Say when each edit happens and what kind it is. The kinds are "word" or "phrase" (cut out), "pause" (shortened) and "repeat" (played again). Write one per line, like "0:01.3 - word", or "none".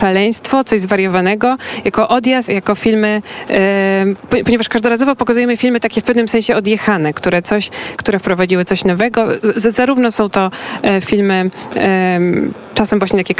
0:02.5 - word
0:08.0 - phrase